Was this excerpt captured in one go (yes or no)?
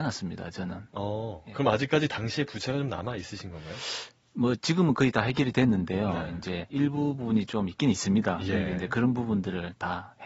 yes